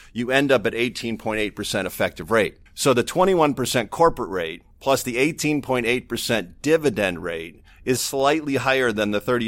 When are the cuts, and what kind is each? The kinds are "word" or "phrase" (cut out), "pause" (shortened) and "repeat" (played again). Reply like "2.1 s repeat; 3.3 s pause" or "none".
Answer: 2.7 s pause; 4.7 s pause; 8.0 s word